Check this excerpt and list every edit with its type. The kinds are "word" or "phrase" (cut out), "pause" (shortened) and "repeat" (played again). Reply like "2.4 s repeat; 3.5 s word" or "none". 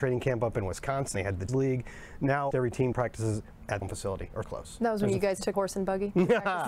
1.1 s word; 1.5 s word; 2.5 s word; 2.9 s word; 3.8 s word; 4.4 s word; 5.5 s word